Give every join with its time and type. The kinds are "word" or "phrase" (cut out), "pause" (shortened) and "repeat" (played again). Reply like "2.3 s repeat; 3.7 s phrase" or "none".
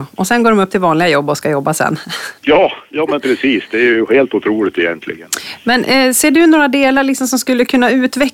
2.4 s pause